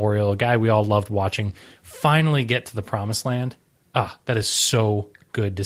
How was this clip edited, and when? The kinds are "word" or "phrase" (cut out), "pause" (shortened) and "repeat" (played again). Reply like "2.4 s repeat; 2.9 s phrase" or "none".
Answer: none